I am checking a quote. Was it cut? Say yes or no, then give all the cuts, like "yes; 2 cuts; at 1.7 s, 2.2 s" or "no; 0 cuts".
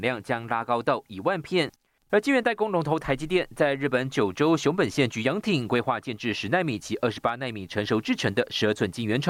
no; 0 cuts